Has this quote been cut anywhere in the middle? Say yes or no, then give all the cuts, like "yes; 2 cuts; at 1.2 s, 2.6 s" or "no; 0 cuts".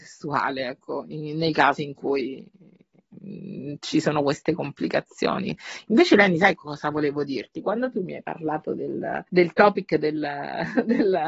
yes; 1 cut; at 9.3 s